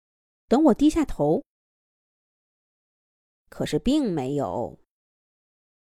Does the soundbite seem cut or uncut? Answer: uncut